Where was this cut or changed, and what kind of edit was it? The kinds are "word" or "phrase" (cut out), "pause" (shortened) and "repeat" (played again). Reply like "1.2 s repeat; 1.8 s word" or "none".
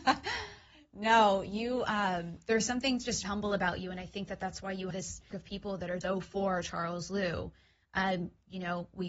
3.2 s word; 4.9 s word; 5.3 s word; 6.0 s word